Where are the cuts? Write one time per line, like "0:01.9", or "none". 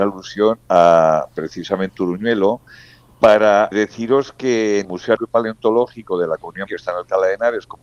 0:01.9
0:03.7
0:04.8
0:05.2
0:06.7